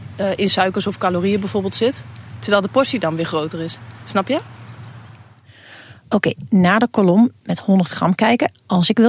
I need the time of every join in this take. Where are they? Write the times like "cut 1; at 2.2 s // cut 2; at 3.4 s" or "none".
none